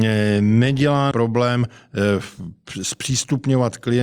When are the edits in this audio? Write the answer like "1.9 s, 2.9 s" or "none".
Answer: 1.1 s